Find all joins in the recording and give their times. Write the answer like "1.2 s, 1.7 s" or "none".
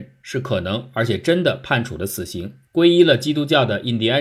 2.6 s